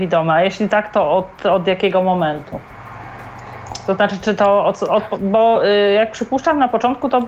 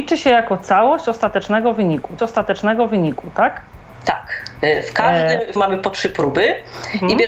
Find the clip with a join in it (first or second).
second